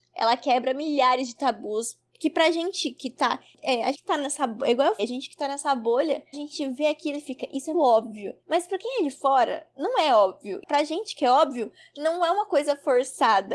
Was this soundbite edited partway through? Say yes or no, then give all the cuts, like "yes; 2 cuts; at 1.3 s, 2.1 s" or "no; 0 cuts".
yes; 4 cuts; at 3.9 s, 5.0 s, 6.3 s, 7.7 s